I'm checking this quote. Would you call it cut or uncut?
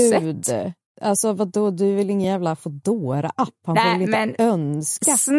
uncut